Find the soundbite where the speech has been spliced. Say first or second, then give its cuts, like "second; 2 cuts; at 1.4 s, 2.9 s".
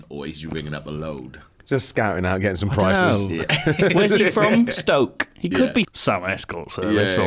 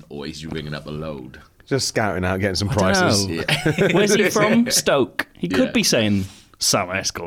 first; 1 cut; at 5.8 s